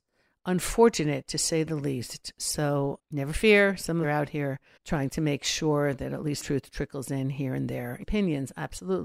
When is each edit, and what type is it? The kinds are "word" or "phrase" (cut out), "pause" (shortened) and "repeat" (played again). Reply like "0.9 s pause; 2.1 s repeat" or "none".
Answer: 3.0 s word; 4.0 s phrase; 4.8 s pause; 6.4 s word; 8.0 s phrase